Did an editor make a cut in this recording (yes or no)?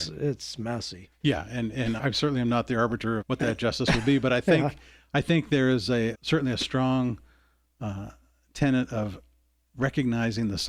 yes